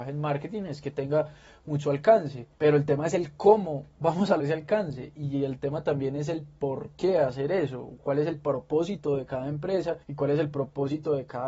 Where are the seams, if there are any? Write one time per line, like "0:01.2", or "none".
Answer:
0:02.5
0:04.4
0:10.0